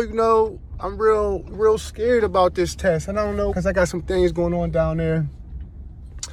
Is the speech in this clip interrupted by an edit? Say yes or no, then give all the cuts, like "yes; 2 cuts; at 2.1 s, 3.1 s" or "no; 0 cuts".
yes; 2 cuts; at 1.5 s, 3.5 s